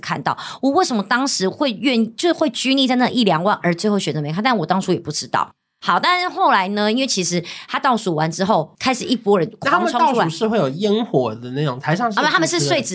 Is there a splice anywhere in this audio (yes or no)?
no